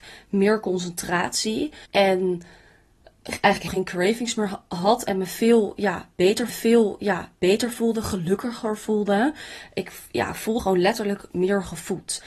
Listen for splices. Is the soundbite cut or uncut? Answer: cut